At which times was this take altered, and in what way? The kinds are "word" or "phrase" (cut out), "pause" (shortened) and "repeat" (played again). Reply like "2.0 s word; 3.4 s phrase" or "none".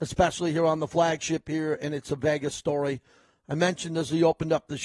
none